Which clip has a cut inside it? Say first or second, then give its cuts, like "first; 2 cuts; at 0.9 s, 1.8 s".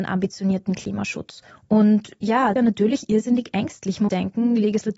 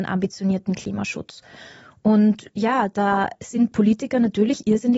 first; 3 cuts; at 1.5 s, 2.6 s, 4.1 s